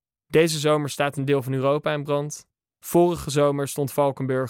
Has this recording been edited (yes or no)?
no